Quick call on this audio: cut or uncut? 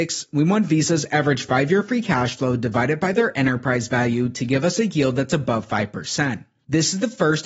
uncut